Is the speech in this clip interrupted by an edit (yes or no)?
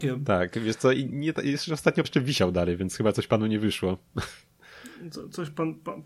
yes